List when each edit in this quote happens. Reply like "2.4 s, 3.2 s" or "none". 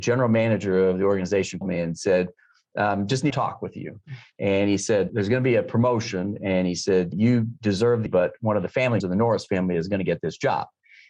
1.6 s, 3.3 s, 5.1 s, 7.1 s, 8.1 s, 9.0 s